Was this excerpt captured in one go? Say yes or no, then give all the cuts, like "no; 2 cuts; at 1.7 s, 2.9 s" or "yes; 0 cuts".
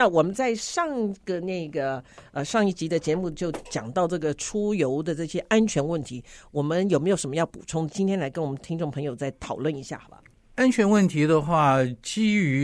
yes; 0 cuts